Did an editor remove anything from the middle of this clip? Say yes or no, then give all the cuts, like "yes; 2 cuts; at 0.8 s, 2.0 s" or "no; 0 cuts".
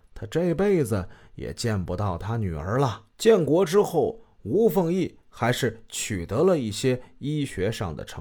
yes; 1 cut; at 3.1 s